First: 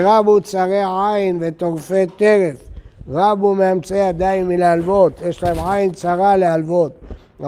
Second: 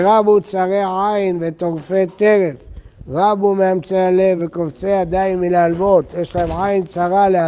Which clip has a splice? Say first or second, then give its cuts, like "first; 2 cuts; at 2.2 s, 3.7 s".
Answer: first; 1 cut; at 3.9 s